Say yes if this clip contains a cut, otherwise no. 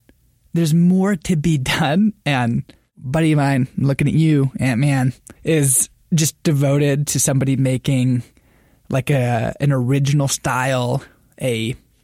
yes